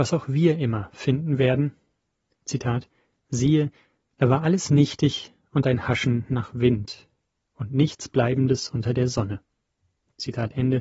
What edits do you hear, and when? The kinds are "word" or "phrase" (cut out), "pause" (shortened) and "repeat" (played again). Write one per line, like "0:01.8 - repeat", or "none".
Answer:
none